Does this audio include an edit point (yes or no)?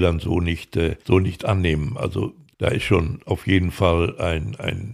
yes